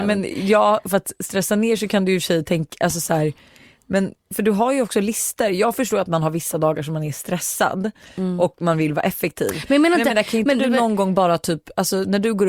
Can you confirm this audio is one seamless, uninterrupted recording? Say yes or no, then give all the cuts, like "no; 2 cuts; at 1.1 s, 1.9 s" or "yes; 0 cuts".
yes; 0 cuts